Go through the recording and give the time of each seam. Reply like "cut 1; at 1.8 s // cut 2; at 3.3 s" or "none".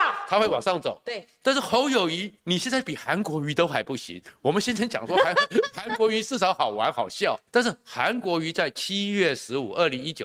cut 1; at 2.4 s // cut 2; at 7.5 s